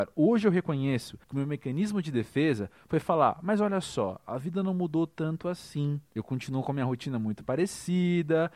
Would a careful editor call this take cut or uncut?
cut